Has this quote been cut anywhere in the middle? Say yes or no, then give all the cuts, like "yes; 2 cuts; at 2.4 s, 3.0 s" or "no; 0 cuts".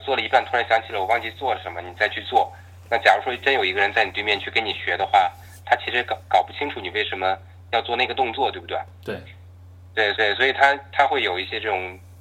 yes; 1 cut; at 10.1 s